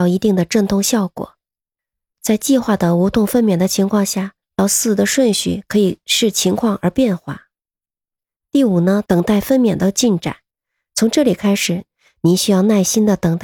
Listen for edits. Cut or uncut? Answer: uncut